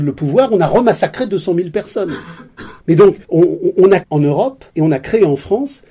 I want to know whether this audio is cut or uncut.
cut